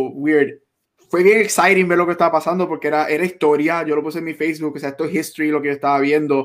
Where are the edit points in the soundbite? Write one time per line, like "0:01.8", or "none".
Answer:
none